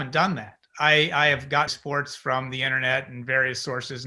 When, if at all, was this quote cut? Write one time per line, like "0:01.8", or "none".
0:01.7

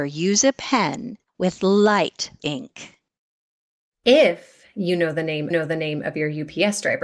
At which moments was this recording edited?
0:01.3
0:02.4
0:05.5

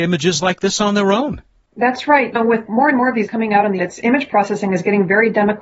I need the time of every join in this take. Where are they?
0:02.4
0:02.7
0:03.3
0:03.8

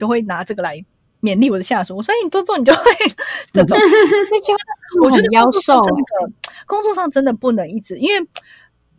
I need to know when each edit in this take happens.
none

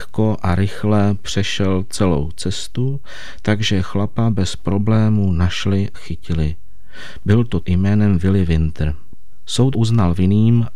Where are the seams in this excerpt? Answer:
0:05.9
0:07.6
0:09.7

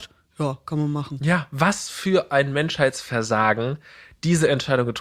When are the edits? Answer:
none

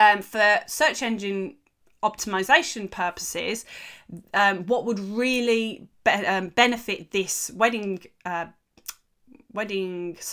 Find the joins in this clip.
none

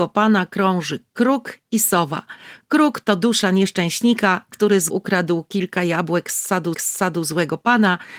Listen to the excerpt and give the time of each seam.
0:04.9
0:06.7

